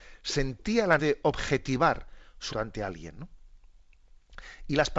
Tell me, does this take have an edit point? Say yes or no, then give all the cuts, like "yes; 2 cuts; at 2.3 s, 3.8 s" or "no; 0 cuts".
yes; 2 cuts; at 1.0 s, 2.5 s